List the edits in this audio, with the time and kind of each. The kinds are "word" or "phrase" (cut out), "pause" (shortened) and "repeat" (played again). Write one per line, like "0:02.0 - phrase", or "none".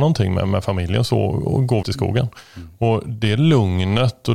0:01.8 - word